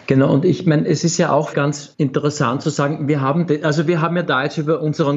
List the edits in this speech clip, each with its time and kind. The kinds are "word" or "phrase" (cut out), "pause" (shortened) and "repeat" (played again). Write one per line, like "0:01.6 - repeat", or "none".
0:01.5 - phrase
0:01.9 - pause